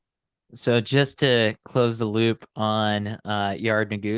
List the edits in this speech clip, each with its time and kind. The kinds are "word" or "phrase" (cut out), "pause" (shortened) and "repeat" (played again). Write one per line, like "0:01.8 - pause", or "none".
none